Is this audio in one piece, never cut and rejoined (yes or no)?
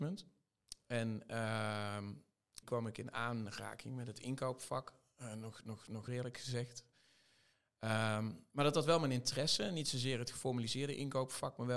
no